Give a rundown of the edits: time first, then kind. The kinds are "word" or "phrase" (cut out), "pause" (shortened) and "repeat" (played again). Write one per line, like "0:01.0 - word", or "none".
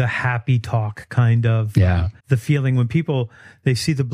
0:02.2 - pause